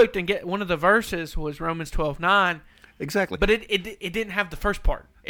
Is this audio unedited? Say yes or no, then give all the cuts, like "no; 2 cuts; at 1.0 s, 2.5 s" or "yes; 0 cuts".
yes; 0 cuts